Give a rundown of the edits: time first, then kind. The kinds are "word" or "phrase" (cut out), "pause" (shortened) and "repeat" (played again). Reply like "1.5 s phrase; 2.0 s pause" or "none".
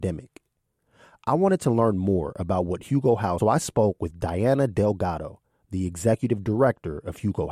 3.4 s phrase